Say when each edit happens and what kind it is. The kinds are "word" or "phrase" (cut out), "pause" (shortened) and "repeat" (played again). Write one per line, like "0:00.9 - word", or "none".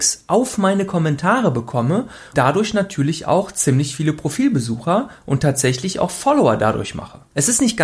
0:02.3 - word